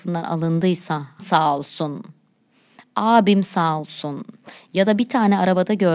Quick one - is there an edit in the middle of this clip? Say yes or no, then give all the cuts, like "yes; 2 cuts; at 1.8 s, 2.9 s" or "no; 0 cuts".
yes; 1 cut; at 1.2 s